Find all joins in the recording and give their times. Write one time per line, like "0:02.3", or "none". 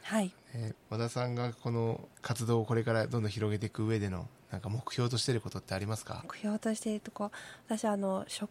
0:02.1
0:06.2